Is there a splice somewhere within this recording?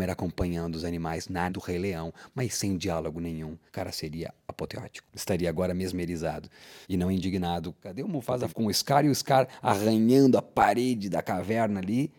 yes; 4 cuts; at 1.5 s, 3.7 s, 6.8 s, 8.5 s

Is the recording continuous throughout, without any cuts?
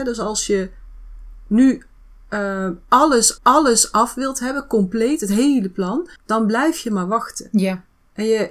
no; 2 cuts; at 3.4 s, 6.2 s

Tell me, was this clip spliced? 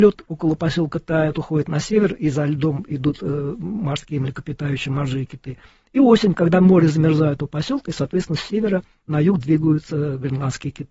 no; 0 cuts

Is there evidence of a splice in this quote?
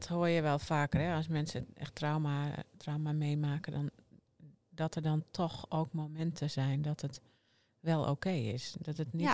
yes; 1 cut; at 4.6 s

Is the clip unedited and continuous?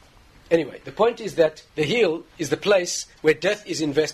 no; 1 cut; at 1.7 s

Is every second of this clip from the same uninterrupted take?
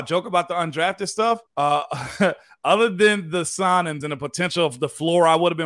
no; 2 cuts; at 1.5 s, 4.0 s

